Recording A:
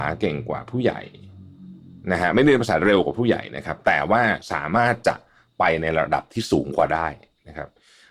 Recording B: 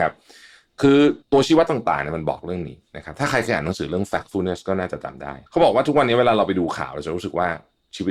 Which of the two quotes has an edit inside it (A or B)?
B